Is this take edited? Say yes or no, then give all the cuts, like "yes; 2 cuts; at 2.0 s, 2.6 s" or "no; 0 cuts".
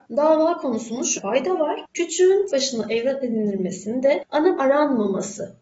yes; 3 cuts; at 1.2 s, 2.5 s, 4.6 s